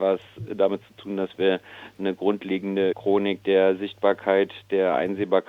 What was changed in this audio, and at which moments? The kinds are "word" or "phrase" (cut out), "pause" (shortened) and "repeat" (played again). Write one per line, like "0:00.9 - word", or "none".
0:02.9 - phrase